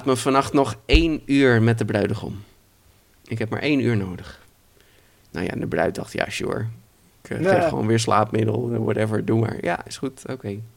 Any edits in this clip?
no; 0 cuts

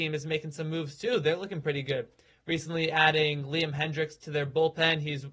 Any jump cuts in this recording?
no; 0 cuts

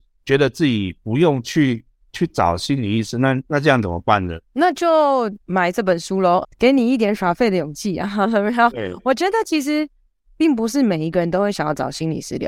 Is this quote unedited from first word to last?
no; 5 cuts; at 2.0 s, 3.5 s, 4.4 s, 5.4 s, 6.4 s

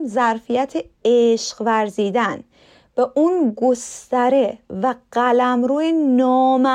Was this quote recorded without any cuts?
yes; 0 cuts

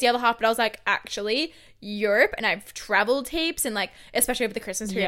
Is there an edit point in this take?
no; 0 cuts

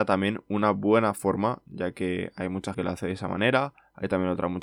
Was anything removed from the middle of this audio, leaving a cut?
yes; 1 cut; at 2.7 s

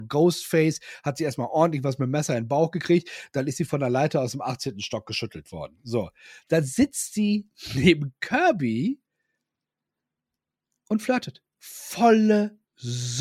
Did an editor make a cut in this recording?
no; 0 cuts

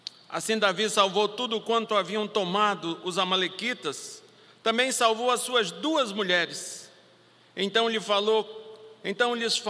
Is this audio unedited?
yes; 0 cuts

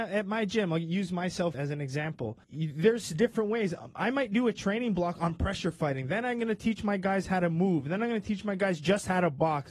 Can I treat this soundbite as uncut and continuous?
no; 2 cuts; at 1.5 s, 2.4 s

